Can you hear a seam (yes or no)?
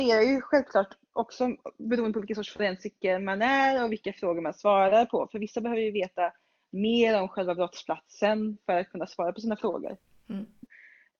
no